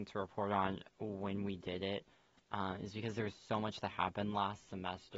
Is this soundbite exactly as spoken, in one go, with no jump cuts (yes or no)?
yes